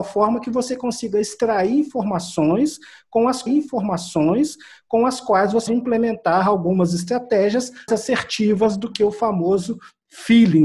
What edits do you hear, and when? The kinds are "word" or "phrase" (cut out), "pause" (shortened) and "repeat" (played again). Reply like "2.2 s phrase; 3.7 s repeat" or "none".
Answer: 3.5 s repeat; 5.7 s word; 7.9 s word